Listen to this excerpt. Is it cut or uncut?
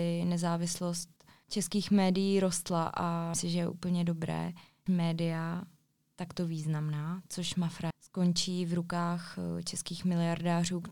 cut